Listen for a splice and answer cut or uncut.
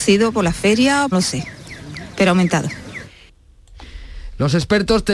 cut